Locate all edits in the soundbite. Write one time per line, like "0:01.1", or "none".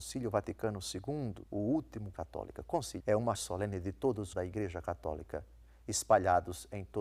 0:01.5
0:02.1
0:03.0
0:03.3
0:04.3